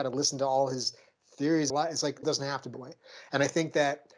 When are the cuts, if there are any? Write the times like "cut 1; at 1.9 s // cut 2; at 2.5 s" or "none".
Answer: cut 1; at 1.7 s // cut 2; at 2.2 s // cut 3; at 2.7 s